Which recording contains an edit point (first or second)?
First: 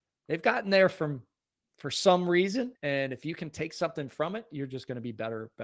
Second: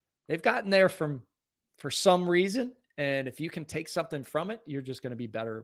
first